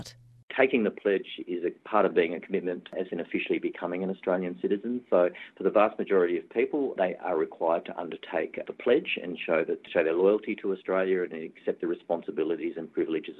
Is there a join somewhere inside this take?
yes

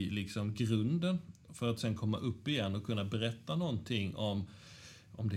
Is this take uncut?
yes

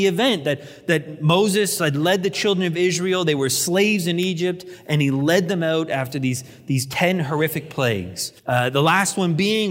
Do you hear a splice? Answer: yes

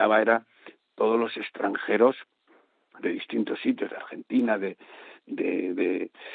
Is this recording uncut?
yes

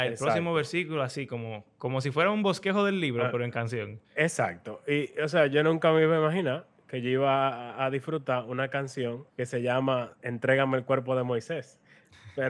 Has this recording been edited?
yes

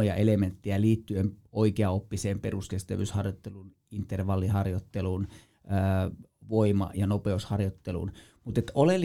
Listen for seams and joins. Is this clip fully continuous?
yes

